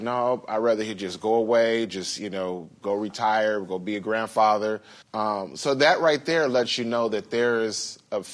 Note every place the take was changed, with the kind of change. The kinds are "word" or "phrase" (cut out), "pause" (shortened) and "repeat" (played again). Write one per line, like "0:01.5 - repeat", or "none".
0:05.0 - pause